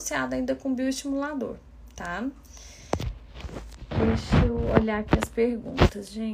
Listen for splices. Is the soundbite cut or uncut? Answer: uncut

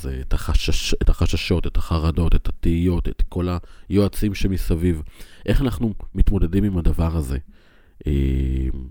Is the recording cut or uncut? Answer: uncut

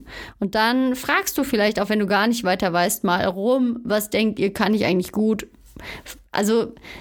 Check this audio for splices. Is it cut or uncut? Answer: uncut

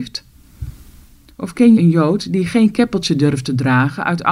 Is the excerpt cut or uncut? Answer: cut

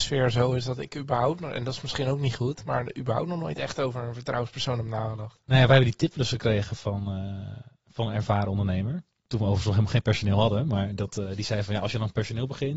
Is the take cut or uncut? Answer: cut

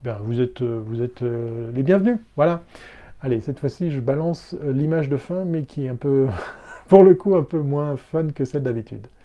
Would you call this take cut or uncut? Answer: uncut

